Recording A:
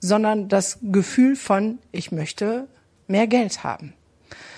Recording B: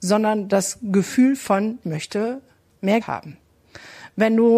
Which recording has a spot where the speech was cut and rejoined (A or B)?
B